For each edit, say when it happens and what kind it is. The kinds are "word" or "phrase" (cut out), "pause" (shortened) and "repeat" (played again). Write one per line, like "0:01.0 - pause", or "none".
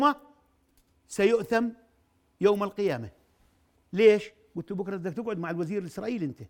none